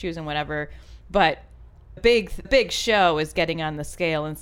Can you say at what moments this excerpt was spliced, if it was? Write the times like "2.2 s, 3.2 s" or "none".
2.0 s, 2.4 s